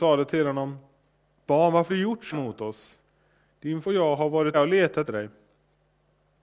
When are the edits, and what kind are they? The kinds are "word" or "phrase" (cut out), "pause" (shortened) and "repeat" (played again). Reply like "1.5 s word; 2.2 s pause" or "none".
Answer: 1.5 s word; 1.9 s word; 2.3 s word; 3.8 s word; 4.5 s word; 5.1 s word